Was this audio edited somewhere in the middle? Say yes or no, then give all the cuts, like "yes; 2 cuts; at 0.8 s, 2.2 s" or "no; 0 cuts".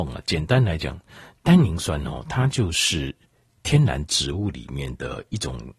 no; 0 cuts